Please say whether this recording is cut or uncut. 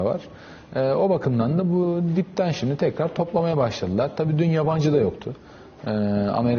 uncut